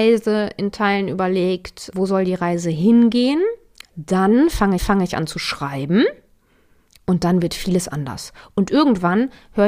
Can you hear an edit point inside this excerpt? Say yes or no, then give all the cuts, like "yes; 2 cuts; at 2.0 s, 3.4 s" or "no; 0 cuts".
yes; 2 cuts; at 1.9 s, 4.8 s